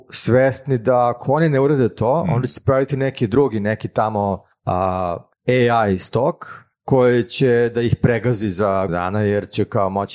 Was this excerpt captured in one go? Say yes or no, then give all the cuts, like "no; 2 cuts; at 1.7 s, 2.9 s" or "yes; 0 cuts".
no; 1 cut; at 8.9 s